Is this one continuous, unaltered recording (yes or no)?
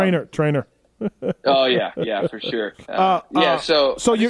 no